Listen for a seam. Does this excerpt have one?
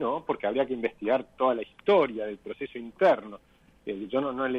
no; 0 cuts

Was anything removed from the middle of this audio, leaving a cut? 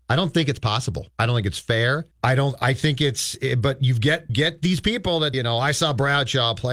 yes; 4 cuts; at 1.1 s, 2.1 s, 4.3 s, 5.3 s

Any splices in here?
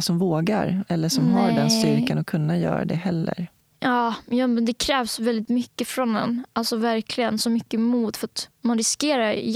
no; 0 cuts

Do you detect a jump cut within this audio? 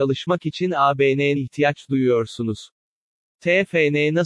yes; 1 cut; at 1.4 s

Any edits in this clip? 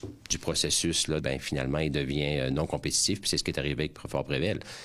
yes; 1 cut; at 1.2 s

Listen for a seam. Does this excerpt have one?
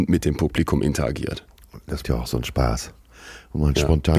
yes; 1 cut; at 2.0 s

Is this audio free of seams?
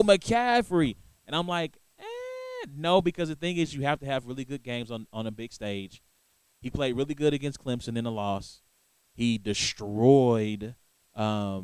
yes; 0 cuts

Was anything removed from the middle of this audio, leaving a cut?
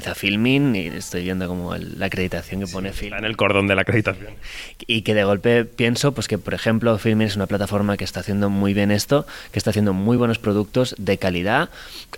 no; 0 cuts

